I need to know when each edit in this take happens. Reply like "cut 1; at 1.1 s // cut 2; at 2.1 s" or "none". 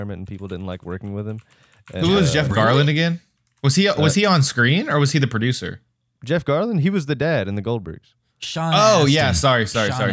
none